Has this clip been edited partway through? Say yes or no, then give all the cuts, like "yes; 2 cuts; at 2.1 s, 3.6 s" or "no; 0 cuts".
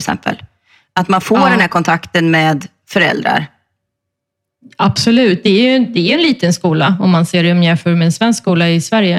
no; 0 cuts